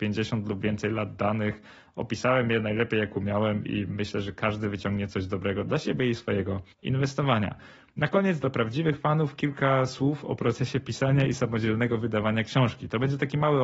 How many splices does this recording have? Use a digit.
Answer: 1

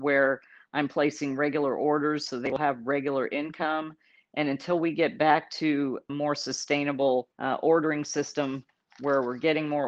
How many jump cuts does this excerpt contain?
2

